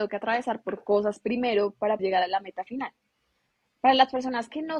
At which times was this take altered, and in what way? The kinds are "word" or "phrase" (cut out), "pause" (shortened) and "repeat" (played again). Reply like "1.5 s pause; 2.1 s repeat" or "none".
2.0 s word